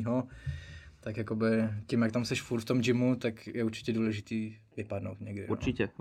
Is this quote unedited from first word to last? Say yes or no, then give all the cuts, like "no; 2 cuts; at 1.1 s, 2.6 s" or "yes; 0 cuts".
yes; 0 cuts